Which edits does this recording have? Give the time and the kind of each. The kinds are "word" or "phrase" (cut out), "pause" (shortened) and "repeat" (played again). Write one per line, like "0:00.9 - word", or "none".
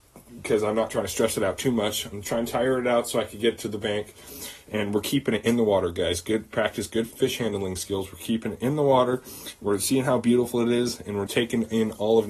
0:02.2 - word
0:11.3 - word